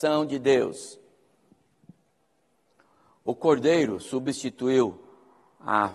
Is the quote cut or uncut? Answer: uncut